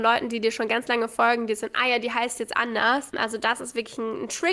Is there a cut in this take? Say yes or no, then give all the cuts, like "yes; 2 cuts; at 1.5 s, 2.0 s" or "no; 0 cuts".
no; 0 cuts